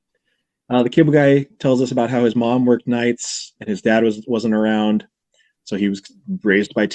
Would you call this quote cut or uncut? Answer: uncut